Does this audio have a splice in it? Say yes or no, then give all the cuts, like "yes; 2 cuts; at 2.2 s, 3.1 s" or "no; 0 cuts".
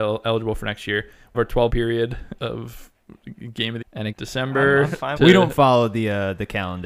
yes; 6 cuts; at 1.3 s, 1.7 s, 2.4 s, 3.8 s, 4.1 s, 5.2 s